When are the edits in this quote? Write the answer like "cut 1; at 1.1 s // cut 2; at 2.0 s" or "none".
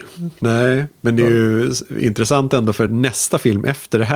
none